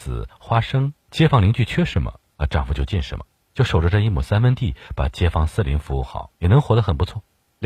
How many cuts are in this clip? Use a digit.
2